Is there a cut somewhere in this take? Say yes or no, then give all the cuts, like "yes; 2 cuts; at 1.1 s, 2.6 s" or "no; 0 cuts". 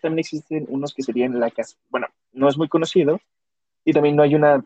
no; 0 cuts